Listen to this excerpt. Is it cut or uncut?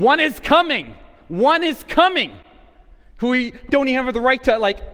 cut